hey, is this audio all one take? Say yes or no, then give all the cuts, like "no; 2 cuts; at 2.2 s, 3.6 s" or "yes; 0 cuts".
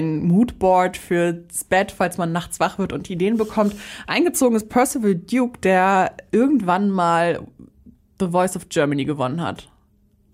yes; 0 cuts